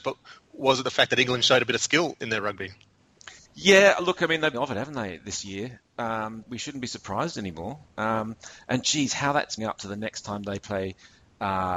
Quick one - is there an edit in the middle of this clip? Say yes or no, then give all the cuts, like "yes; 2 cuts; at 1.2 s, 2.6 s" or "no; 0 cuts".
yes; 4 cuts; at 3.4 s, 4.5 s, 6.4 s, 9.6 s